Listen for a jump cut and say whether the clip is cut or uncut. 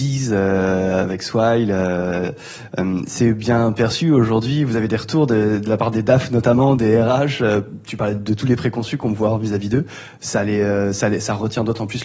uncut